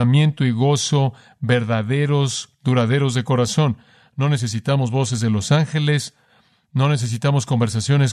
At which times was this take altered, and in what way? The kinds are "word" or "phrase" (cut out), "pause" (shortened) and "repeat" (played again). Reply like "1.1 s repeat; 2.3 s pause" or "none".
none